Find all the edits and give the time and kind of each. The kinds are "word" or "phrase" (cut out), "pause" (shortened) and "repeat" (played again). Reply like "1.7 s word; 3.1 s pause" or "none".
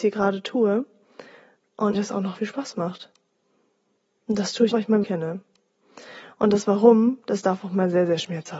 1.9 s word; 2.4 s word; 4.7 s word; 5.0 s word